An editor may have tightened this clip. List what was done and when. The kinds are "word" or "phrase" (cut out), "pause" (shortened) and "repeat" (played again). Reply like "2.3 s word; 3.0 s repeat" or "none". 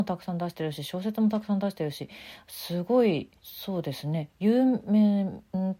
3.4 s pause